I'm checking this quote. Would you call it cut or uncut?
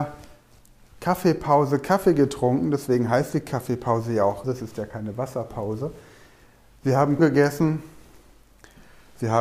cut